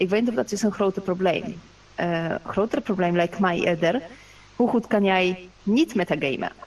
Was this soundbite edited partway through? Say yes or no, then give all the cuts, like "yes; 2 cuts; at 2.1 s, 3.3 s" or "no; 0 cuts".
no; 0 cuts